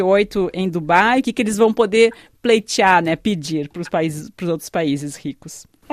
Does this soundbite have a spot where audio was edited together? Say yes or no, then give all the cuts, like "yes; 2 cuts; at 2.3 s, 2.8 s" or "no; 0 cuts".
no; 0 cuts